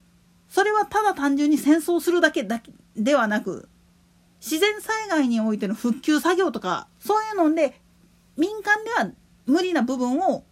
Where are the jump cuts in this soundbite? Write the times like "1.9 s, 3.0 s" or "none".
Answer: 6.9 s